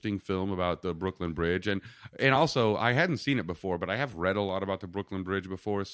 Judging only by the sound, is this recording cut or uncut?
uncut